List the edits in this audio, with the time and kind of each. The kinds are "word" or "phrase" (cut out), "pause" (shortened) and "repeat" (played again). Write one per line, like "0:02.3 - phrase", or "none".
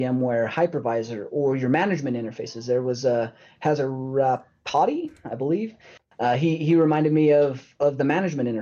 none